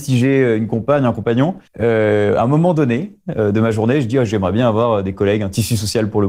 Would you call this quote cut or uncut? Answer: cut